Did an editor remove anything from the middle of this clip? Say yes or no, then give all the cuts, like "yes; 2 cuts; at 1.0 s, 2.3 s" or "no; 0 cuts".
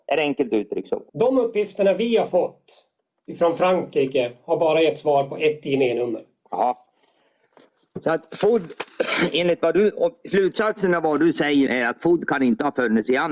yes; 2 cuts; at 1.1 s, 11.7 s